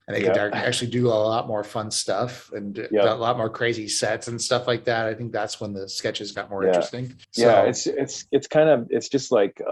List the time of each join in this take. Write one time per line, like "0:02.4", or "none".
0:07.2